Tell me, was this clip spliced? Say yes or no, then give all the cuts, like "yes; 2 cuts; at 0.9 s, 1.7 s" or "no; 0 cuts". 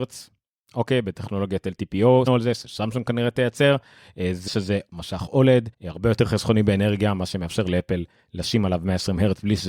yes; 3 cuts; at 2.3 s, 4.5 s, 5.7 s